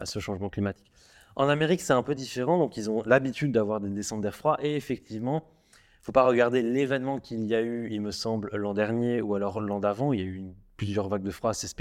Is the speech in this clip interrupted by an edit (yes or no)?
no